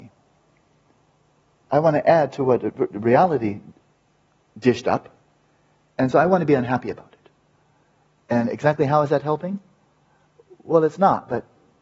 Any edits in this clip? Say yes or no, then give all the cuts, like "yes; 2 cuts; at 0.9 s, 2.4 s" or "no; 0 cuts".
no; 0 cuts